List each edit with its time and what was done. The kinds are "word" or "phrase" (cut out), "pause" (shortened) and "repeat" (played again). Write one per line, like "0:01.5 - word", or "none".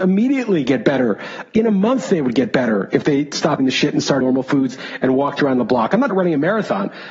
0:03.6 - word
0:04.2 - word
0:06.1 - phrase